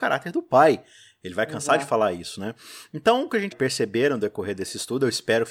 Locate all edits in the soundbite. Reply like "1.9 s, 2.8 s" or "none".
3.5 s